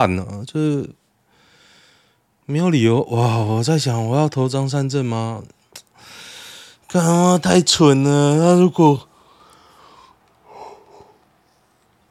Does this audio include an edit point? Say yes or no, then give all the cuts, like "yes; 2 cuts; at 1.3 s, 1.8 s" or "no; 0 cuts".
no; 0 cuts